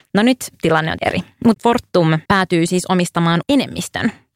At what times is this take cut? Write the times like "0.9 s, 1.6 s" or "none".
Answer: 1.0 s, 1.5 s, 2.3 s, 3.4 s

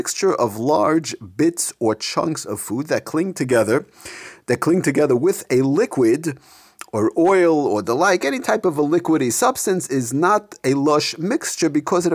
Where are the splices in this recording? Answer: none

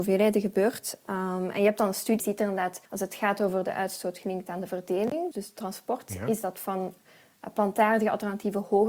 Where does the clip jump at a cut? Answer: 2.2 s, 2.9 s, 5.3 s

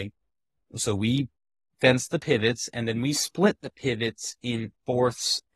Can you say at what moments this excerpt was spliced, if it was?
none

